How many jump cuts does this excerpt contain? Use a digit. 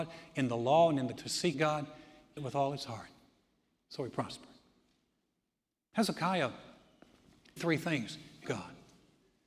5